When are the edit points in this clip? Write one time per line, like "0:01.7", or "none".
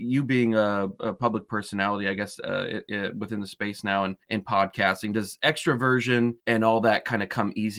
0:04.2
0:06.4